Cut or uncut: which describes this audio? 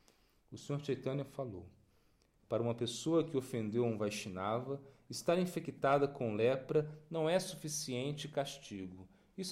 uncut